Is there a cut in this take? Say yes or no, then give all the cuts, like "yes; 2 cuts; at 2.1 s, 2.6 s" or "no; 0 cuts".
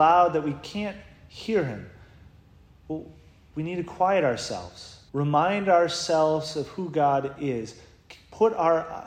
yes; 1 cut; at 5.1 s